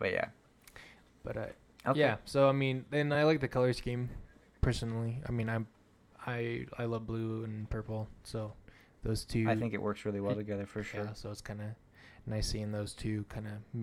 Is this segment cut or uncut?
uncut